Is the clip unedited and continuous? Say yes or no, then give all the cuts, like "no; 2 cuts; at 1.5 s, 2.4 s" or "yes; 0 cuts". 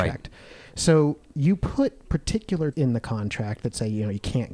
no; 2 cuts; at 1.3 s, 2.7 s